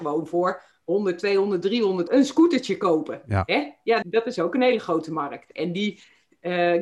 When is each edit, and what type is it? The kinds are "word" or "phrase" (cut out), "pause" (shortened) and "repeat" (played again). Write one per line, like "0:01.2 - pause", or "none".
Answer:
0:02.1 - word
0:04.0 - word